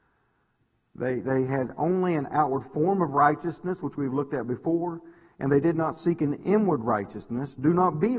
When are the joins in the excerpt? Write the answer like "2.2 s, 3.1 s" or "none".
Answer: none